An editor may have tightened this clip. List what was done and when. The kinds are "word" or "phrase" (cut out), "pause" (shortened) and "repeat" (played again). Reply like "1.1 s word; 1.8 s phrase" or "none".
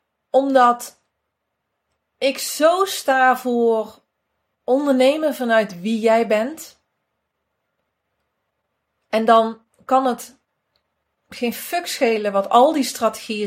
none